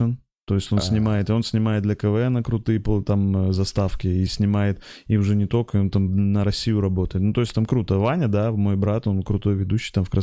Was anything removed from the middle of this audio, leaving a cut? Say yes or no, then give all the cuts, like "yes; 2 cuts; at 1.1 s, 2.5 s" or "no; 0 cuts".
no; 0 cuts